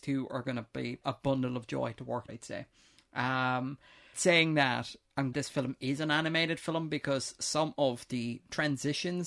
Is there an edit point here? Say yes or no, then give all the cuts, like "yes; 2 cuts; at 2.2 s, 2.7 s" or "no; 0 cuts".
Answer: yes; 4 cuts; at 1.0 s, 2.3 s, 4.1 s, 5.3 s